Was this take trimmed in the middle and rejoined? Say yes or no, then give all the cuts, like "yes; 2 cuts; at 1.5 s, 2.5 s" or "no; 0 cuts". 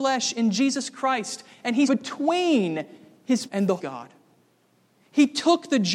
yes; 3 cuts; at 1.9 s, 3.5 s, 3.8 s